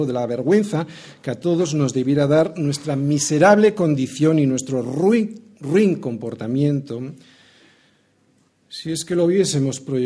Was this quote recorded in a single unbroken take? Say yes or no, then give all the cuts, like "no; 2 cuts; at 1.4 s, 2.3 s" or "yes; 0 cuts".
yes; 0 cuts